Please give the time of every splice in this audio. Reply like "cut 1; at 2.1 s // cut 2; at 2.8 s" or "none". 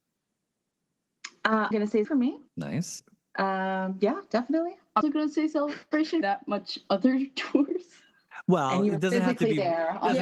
cut 1; at 1.7 s // cut 2; at 2.0 s // cut 3; at 2.5 s // cut 4; at 5.0 s // cut 5; at 6.2 s